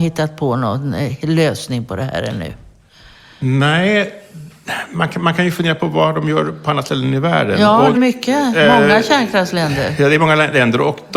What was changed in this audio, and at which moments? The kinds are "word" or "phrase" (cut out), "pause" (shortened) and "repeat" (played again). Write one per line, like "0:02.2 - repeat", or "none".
0:07.9 - word